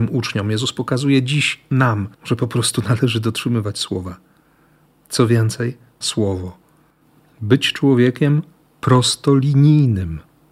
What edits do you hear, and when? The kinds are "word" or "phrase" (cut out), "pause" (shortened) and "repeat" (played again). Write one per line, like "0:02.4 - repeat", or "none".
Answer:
0:02.1 - pause
0:06.0 - phrase